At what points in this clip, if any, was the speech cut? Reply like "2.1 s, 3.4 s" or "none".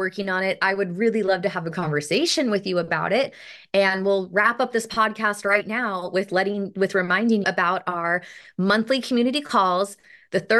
7.4 s